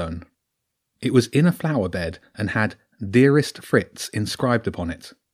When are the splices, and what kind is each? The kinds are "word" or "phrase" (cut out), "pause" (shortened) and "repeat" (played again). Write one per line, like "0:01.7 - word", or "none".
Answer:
none